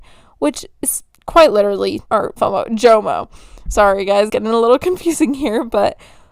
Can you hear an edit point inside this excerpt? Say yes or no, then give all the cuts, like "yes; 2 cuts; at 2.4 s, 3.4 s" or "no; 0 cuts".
yes; 4 cuts; at 1.1 s, 2.1 s, 2.4 s, 4.3 s